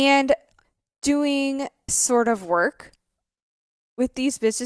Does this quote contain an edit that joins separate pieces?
yes; 1 cut; at 1.9 s

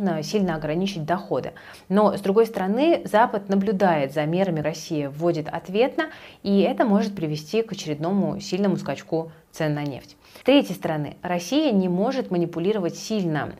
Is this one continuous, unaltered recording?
no; 2 cuts; at 4.6 s, 10.4 s

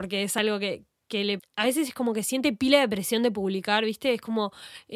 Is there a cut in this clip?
yes; 1 cut; at 1.4 s

